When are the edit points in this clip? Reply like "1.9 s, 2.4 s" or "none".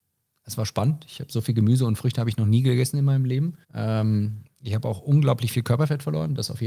3.6 s